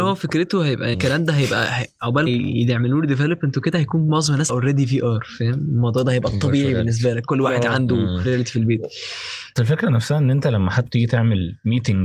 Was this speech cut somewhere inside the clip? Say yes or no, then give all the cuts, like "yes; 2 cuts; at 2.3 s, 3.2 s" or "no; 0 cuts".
yes; 6 cuts; at 0.9 s, 2.3 s, 4.5 s, 8.2 s, 9.6 s, 10.9 s